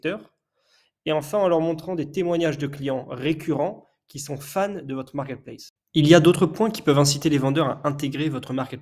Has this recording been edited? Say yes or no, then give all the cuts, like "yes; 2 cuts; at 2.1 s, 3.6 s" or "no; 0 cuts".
no; 0 cuts